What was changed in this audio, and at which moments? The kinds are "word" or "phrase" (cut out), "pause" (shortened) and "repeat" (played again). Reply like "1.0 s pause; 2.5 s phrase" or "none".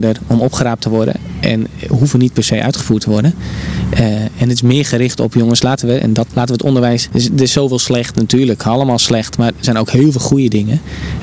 9.6 s word